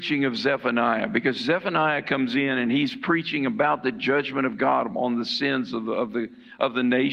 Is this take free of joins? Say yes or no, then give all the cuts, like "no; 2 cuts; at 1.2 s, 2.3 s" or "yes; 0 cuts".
yes; 0 cuts